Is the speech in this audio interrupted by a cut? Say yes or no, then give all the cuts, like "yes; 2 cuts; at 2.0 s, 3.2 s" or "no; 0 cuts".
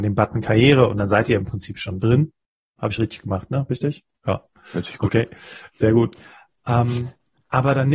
no; 0 cuts